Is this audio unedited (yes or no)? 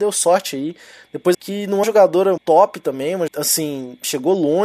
no